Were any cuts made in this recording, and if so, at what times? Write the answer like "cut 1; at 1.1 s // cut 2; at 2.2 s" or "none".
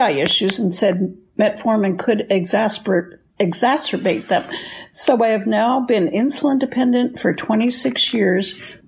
none